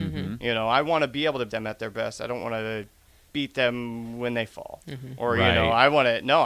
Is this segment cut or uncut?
cut